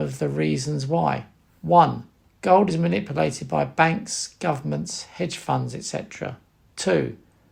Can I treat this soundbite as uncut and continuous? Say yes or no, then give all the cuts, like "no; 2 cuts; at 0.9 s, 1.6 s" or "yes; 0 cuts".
yes; 0 cuts